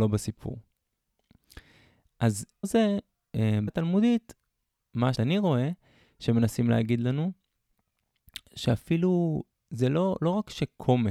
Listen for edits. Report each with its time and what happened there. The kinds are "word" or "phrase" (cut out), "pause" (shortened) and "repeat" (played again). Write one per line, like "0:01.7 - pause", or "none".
0:02.6 - word
0:03.7 - word
0:05.1 - word